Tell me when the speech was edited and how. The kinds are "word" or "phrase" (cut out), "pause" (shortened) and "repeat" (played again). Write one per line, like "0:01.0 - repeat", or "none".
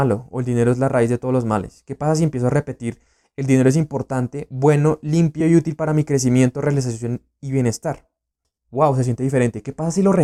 none